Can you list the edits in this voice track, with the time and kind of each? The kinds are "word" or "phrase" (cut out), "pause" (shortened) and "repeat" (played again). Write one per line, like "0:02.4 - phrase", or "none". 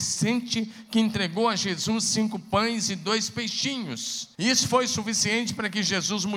0:04.3 - pause